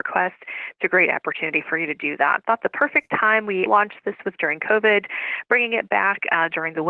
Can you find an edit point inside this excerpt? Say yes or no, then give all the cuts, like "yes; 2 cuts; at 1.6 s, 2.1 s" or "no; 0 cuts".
yes; 2 cuts; at 3.7 s, 4.4 s